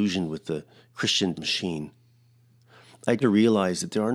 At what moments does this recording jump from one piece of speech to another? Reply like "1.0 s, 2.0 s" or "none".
1.3 s, 3.2 s